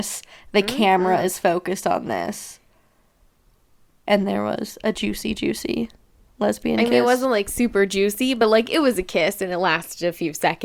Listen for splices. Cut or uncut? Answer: uncut